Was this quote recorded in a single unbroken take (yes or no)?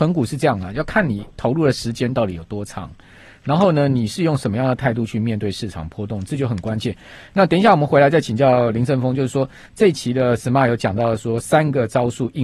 yes